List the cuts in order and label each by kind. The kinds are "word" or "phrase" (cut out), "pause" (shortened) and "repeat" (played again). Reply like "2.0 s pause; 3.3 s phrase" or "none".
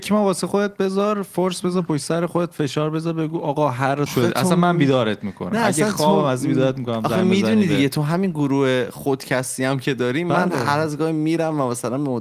4.1 s word

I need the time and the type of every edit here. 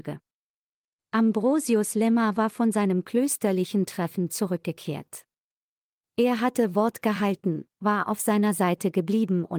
none

